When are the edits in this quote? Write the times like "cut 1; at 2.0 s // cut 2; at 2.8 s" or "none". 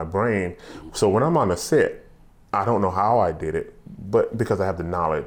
none